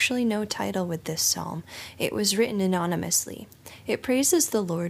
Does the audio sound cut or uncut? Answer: uncut